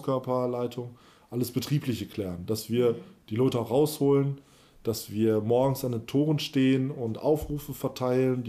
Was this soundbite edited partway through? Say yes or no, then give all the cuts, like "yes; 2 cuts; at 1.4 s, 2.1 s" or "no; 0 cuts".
no; 0 cuts